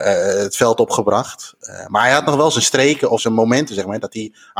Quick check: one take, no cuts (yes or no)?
no